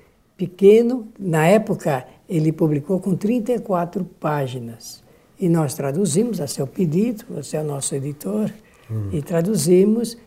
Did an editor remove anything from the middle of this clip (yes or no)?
no